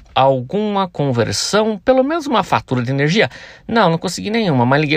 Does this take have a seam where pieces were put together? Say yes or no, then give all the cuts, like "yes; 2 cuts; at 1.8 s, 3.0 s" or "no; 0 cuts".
no; 0 cuts